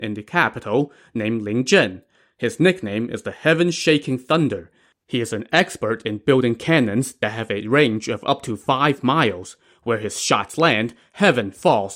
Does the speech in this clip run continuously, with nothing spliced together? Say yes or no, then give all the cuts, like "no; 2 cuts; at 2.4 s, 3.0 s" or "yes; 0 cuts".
yes; 0 cuts